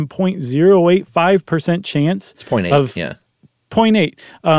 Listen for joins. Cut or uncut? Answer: uncut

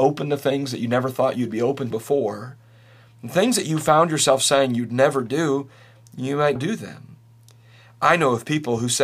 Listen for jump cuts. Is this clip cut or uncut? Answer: cut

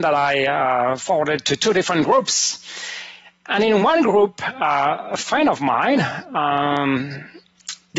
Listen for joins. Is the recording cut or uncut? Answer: uncut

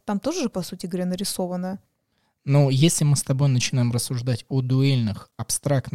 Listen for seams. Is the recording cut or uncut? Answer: uncut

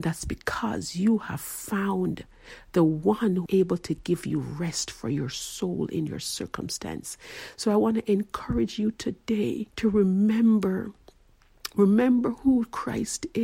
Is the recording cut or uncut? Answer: cut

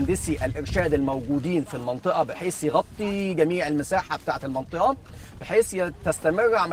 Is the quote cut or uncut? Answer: uncut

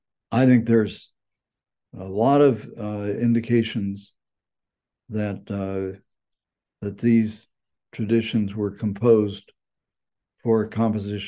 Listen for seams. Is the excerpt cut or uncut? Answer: uncut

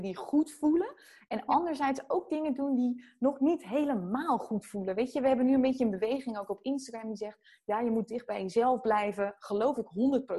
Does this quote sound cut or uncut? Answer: uncut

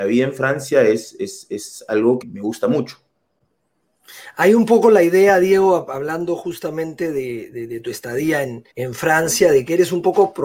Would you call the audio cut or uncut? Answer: cut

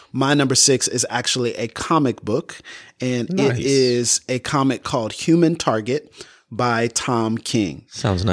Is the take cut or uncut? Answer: uncut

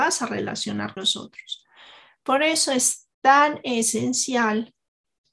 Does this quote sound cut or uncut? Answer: cut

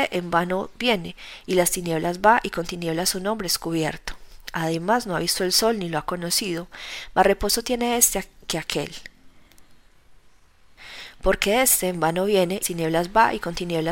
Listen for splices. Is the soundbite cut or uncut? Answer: cut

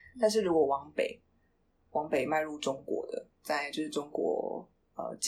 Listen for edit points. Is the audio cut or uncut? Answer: uncut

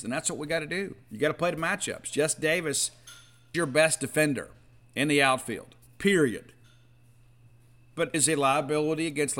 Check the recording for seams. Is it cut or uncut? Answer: cut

